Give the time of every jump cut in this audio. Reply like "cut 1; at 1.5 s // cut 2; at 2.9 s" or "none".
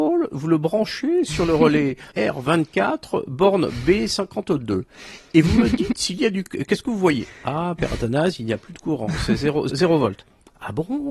cut 1; at 2.1 s // cut 2; at 9.7 s